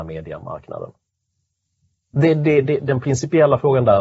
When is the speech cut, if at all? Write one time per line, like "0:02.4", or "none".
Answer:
none